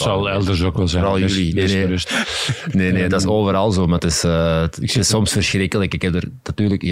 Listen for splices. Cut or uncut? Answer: uncut